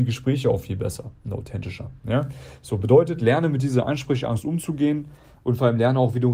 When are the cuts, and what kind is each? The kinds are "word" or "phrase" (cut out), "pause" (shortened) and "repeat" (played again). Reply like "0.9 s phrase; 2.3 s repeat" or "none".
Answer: none